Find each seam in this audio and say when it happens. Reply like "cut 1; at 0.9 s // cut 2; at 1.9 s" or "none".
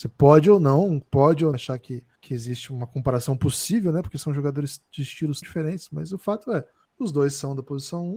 cut 1; at 1.0 s // cut 2; at 1.5 s // cut 3; at 2.2 s // cut 4; at 5.4 s // cut 5; at 6.9 s